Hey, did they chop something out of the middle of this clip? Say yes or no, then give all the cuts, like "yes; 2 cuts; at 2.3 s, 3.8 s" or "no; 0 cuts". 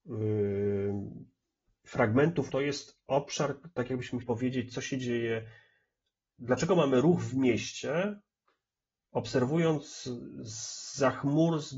yes; 2 cuts; at 2.5 s, 4.2 s